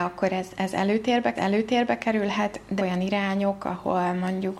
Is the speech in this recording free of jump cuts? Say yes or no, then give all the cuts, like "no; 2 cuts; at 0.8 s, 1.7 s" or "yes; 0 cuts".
no; 2 cuts; at 1.4 s, 2.8 s